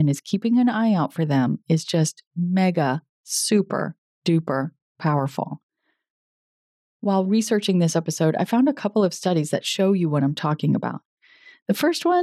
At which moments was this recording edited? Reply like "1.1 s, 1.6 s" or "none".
none